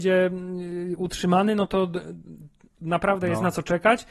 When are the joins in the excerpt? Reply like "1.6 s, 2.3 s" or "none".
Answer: none